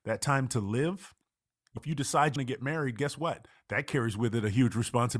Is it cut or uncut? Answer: cut